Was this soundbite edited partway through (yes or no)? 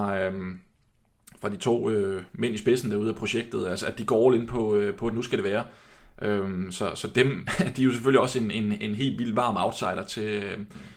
no